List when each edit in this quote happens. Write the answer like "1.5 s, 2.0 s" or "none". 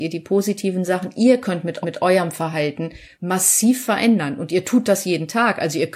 1.8 s, 3.1 s